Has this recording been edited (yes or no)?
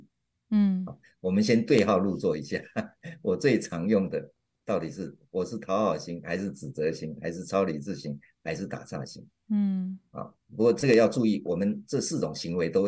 no